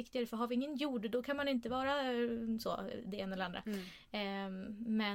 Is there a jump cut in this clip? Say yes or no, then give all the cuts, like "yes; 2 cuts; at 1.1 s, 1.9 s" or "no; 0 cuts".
no; 0 cuts